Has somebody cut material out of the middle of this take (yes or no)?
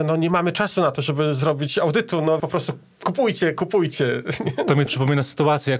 yes